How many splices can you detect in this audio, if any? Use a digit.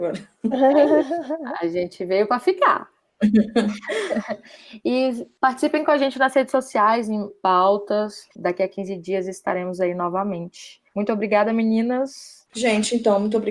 3